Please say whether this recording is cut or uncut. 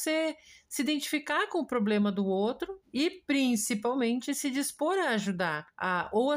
uncut